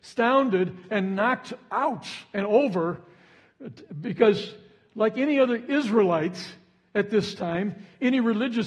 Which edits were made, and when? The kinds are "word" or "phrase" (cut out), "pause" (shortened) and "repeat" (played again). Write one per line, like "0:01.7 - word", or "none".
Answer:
none